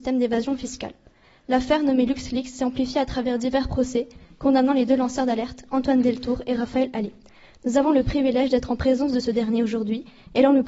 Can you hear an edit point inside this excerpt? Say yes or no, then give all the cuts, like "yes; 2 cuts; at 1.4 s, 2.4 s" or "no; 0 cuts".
no; 0 cuts